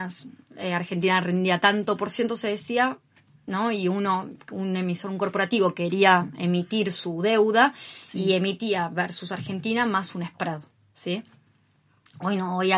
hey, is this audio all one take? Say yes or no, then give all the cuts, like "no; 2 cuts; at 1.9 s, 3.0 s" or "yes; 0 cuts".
yes; 0 cuts